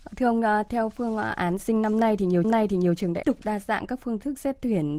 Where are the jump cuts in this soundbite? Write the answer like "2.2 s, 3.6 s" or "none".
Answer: 1.6 s, 2.4 s, 3.2 s